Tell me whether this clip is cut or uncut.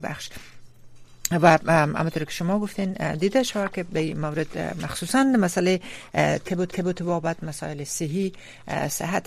cut